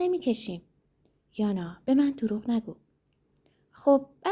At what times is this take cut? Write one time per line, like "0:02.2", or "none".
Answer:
none